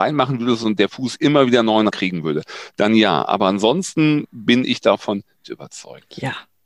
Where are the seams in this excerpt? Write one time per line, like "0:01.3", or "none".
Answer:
0:01.9
0:05.4

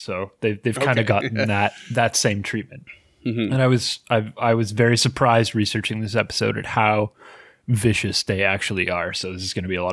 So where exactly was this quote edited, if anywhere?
none

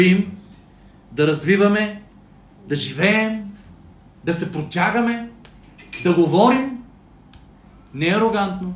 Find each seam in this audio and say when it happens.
none

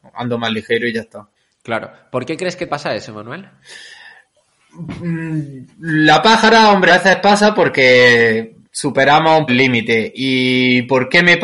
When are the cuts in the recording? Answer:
0:01.4
0:02.7
0:05.7
0:06.9
0:08.6
0:09.5

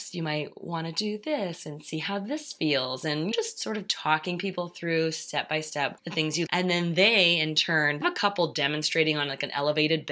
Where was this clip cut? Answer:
0:03.3
0:06.5
0:08.0

